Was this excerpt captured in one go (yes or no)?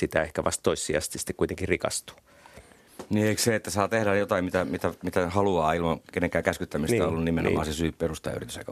yes